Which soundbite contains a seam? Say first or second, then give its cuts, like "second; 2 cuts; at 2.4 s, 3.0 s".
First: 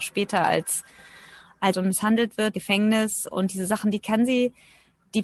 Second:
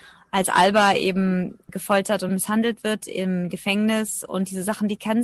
first; 2 cuts; at 1.7 s, 2.5 s